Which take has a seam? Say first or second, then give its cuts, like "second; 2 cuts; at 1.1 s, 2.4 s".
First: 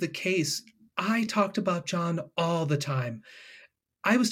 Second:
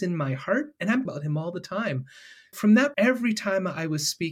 second; 3 cuts; at 1.0 s, 2.5 s, 2.9 s